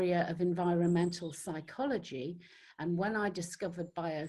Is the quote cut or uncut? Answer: uncut